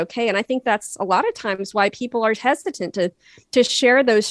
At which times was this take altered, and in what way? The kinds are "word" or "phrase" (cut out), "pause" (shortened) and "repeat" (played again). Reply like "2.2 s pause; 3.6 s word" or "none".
none